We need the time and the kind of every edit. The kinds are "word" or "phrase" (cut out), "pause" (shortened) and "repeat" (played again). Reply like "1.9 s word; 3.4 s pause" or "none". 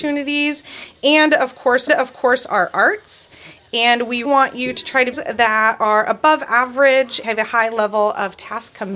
1.9 s repeat; 4.2 s word; 5.1 s phrase; 7.2 s word